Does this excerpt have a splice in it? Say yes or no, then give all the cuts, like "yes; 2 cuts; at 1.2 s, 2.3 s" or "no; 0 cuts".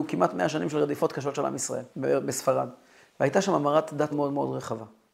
yes; 2 cuts; at 1.9 s, 4.1 s